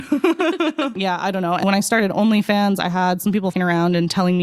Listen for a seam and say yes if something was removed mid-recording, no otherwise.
yes